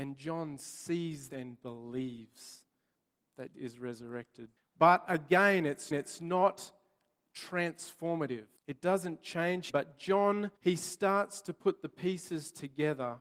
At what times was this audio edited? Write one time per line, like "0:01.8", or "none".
0:01.3
0:03.5
0:04.6
0:05.9
0:08.6
0:09.7
0:10.6